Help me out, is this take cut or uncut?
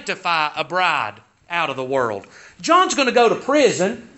uncut